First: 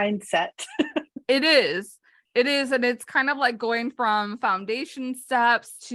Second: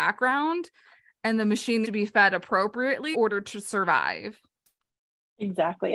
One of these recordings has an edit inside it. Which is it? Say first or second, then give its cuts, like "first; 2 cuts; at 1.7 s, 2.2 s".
second; 2 cuts; at 1.8 s, 3.1 s